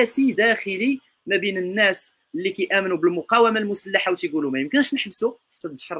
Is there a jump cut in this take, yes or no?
no